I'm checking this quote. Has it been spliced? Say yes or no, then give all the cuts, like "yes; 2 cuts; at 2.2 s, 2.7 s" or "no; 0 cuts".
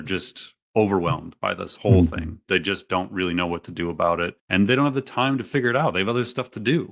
yes; 1 cut; at 4.4 s